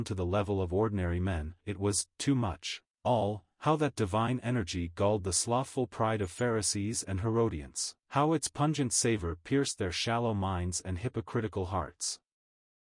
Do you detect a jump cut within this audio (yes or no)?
yes